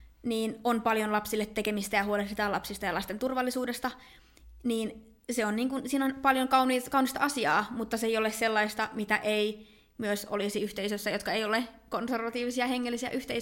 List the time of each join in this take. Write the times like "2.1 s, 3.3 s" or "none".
none